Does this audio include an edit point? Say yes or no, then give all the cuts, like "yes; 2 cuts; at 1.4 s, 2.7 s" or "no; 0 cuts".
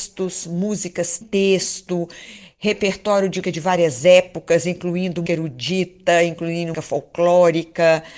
yes; 4 cuts; at 1.2 s, 3.4 s, 5.3 s, 6.7 s